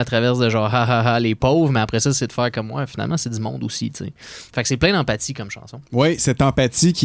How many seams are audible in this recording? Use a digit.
1